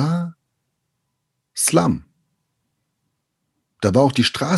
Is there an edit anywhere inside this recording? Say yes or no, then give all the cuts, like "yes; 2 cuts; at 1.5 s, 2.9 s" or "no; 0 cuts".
no; 0 cuts